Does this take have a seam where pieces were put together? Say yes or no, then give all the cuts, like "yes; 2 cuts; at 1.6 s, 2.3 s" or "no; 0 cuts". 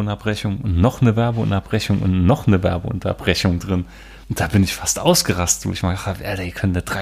yes; 1 cut; at 4.2 s